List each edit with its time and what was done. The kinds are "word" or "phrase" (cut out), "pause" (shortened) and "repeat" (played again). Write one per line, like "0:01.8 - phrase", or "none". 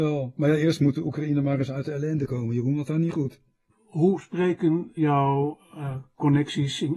0:02.9 - word
0:03.7 - pause
0:05.0 - word